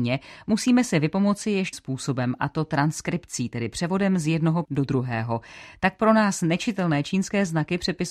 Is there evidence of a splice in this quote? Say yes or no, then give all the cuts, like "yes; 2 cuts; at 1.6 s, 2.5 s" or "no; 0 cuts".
yes; 2 cuts; at 1.7 s, 4.6 s